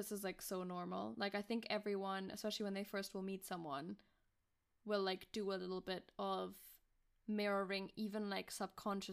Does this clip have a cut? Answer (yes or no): no